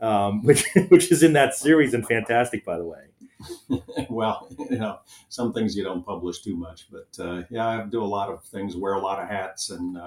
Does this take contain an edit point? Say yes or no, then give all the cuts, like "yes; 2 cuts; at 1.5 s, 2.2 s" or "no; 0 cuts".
no; 0 cuts